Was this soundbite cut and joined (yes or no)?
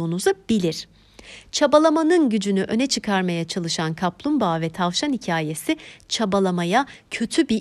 no